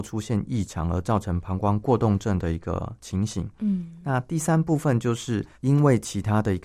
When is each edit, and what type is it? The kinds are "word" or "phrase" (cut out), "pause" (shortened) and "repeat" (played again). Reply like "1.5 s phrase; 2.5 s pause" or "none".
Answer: 5.5 s pause